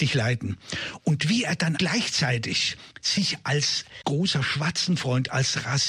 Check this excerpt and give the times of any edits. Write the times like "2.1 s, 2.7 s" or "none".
1.8 s, 2.9 s, 4.0 s